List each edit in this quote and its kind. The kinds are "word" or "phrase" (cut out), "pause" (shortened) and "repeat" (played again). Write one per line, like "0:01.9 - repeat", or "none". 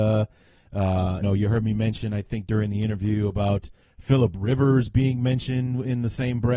0:01.2 - word
0:03.8 - pause